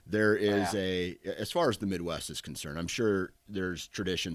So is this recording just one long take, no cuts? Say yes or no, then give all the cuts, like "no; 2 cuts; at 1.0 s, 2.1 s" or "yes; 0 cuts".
yes; 0 cuts